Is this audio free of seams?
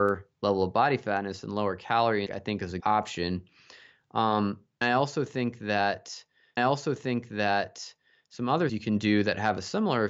no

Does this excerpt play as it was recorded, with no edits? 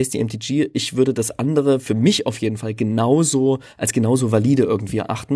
yes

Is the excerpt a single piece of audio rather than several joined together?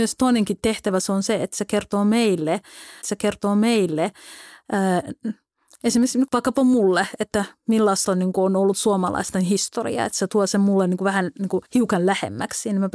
no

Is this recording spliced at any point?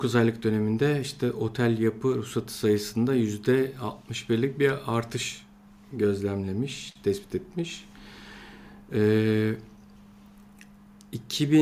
no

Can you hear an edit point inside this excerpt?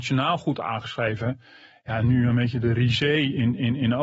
no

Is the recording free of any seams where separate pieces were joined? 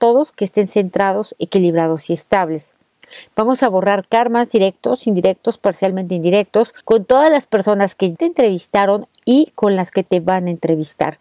no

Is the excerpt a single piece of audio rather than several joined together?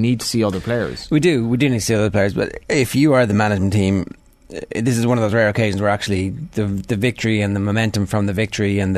yes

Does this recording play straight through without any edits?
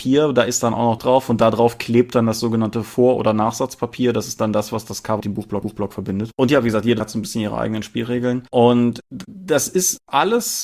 no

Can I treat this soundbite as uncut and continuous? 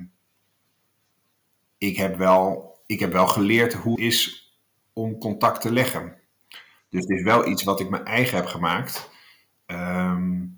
no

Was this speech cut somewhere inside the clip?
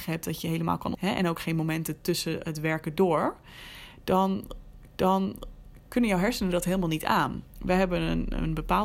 yes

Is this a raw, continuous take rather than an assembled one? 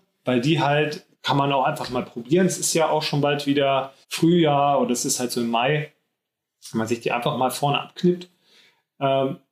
no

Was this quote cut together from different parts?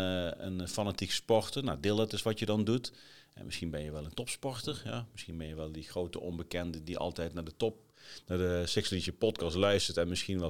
no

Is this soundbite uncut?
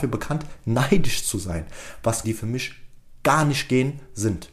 no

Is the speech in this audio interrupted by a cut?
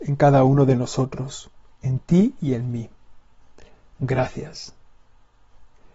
no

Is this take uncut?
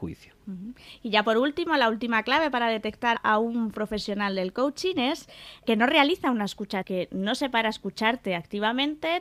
no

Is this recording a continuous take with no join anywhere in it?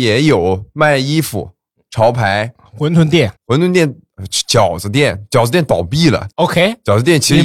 no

